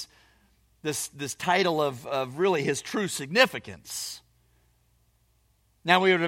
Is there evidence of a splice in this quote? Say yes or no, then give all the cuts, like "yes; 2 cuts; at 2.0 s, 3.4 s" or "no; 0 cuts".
no; 0 cuts